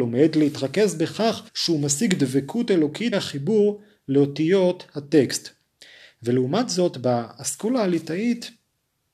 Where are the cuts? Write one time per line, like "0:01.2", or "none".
0:01.5
0:03.1